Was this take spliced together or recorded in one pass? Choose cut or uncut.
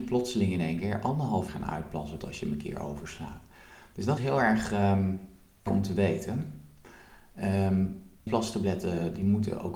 cut